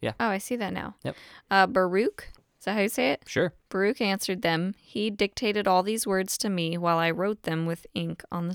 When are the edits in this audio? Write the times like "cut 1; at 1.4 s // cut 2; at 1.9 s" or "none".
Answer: cut 1; at 2.4 s // cut 2; at 3.6 s